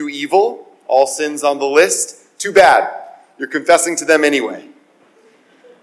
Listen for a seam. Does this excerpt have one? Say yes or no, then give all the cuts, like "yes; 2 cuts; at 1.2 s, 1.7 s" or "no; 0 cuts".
no; 0 cuts